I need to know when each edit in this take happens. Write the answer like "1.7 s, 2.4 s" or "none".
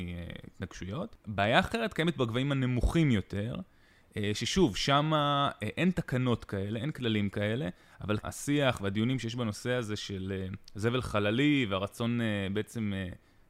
8.2 s